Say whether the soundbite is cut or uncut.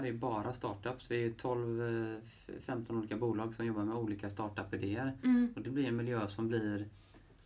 uncut